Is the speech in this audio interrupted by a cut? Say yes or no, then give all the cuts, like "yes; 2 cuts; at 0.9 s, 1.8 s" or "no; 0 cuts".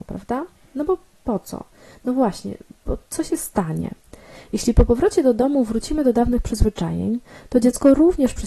no; 0 cuts